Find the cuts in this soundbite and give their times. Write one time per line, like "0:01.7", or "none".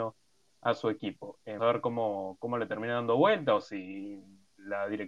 0:01.6